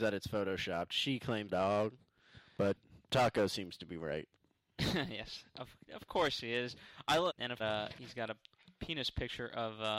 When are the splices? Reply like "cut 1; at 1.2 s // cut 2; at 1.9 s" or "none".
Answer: cut 1; at 1.5 s // cut 2; at 3.0 s // cut 3; at 4.3 s // cut 4; at 7.3 s // cut 5; at 7.6 s